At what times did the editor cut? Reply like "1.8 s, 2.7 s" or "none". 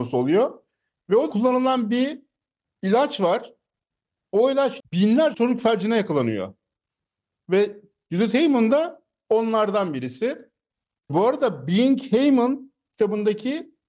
1.3 s, 4.8 s, 5.3 s